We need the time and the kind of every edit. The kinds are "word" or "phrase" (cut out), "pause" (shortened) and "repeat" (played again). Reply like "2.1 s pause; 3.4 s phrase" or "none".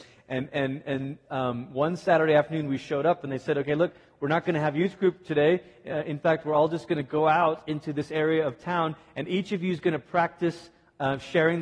none